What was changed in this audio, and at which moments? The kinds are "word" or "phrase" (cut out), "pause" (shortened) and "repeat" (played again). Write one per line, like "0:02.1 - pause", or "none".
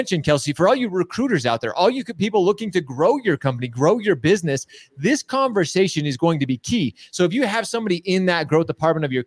none